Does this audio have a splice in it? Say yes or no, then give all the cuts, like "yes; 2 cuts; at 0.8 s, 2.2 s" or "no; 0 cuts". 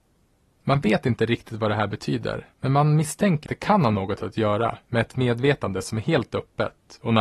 yes; 2 cuts; at 2.5 s, 3.5 s